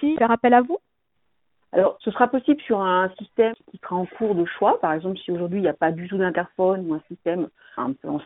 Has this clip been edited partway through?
yes; 1 cut; at 2.0 s

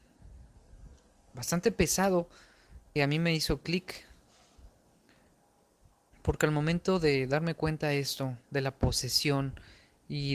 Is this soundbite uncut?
no; 1 cut; at 3.0 s

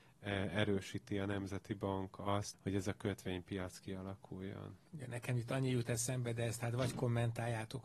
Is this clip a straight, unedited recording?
no; 2 cuts; at 2.5 s, 4.9 s

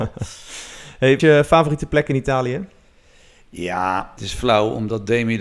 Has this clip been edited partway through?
yes; 2 cuts; at 1.2 s, 4.2 s

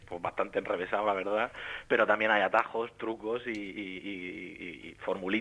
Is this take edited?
no; 0 cuts

